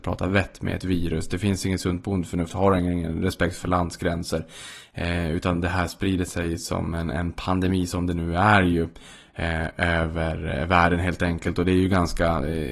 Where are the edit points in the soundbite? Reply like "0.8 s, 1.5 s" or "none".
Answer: none